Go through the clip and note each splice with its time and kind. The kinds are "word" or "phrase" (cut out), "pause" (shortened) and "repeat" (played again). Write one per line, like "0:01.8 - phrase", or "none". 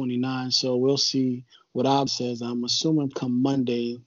0:01.5 - pause
0:02.1 - word
0:03.1 - word